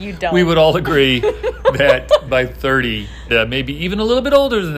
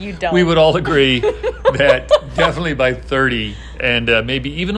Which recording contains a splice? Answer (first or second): first